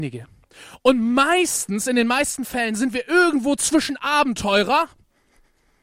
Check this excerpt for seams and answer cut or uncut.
uncut